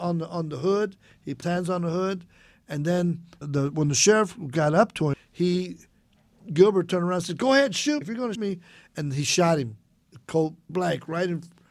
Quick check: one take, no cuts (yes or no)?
no